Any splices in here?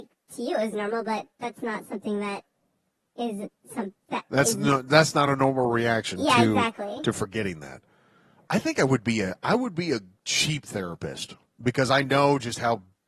no; 0 cuts

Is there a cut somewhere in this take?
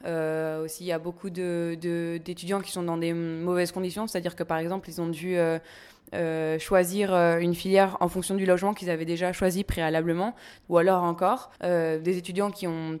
yes; 1 cut; at 11.6 s

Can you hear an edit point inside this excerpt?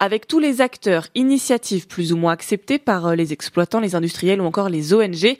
no; 0 cuts

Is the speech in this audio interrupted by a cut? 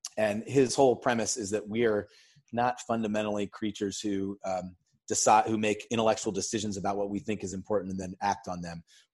no; 0 cuts

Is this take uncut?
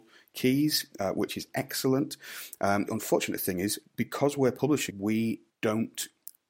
no; 4 cuts; at 2.9 s, 3.9 s, 4.9 s, 5.5 s

